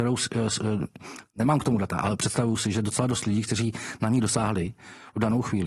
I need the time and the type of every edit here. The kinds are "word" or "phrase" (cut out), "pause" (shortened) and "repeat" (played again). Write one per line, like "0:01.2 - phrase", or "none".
none

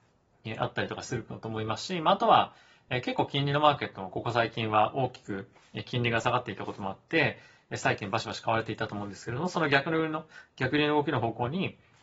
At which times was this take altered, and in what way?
none

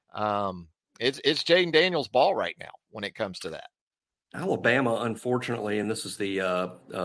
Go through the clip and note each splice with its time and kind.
none

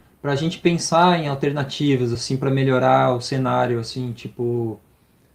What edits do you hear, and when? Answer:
none

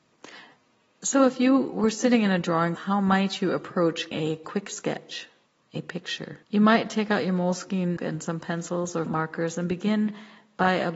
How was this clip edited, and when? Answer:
0:02.8 - word
0:04.1 - word
0:05.5 - pause
0:06.4 - pause
0:08.0 - word
0:09.1 - word

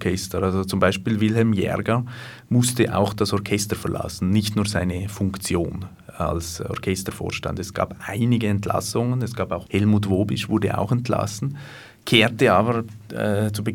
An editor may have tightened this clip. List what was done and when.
0:09.7 - word

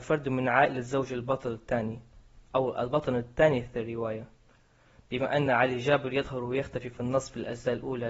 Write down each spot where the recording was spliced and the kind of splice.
none

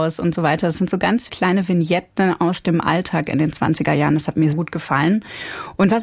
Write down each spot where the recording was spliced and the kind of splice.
0:01.3 - word
0:04.5 - word

